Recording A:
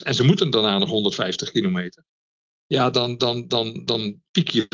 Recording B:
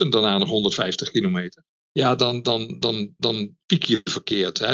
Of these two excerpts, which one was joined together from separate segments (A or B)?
B